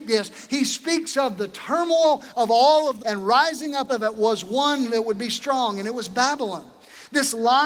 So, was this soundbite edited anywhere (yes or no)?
yes